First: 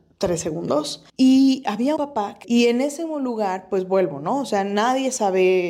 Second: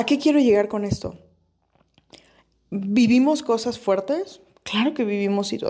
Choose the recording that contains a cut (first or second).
first